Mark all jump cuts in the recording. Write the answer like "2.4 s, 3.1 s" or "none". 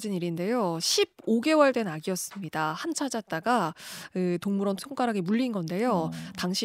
2.9 s, 4.8 s